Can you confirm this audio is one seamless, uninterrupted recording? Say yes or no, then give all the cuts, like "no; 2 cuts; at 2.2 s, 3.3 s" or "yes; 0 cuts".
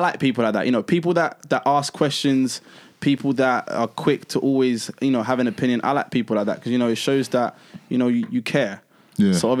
yes; 0 cuts